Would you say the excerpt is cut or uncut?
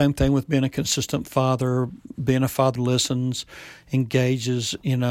cut